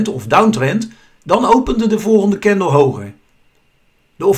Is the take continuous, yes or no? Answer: yes